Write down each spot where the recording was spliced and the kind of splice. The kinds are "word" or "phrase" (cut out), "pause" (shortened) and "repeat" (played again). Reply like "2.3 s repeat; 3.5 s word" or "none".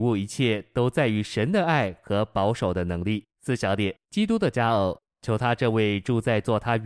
3.3 s pause; 4.0 s pause

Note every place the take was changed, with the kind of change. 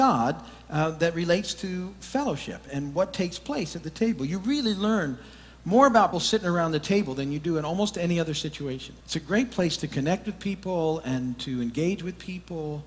2.7 s word; 6.1 s word; 9.0 s pause

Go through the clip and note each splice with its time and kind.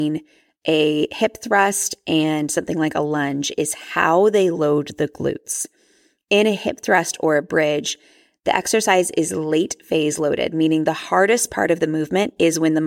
none

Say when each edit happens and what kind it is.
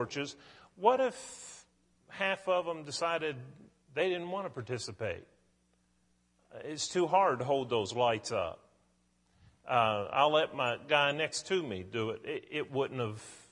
none

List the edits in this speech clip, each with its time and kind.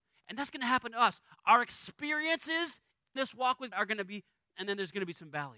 3.2 s word; 3.7 s word; 4.4 s word

